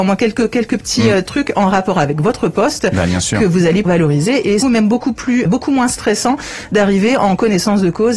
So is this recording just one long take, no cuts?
no; 3 cuts; at 3.9 s, 4.6 s, 5.5 s

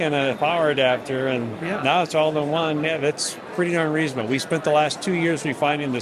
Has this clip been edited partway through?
no; 0 cuts

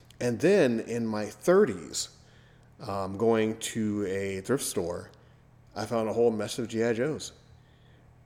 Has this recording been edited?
no; 0 cuts

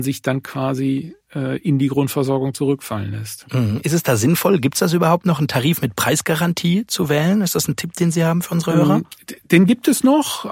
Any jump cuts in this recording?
no; 0 cuts

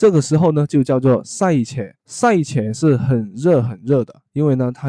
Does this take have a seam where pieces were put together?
yes; 1 cut; at 2.0 s

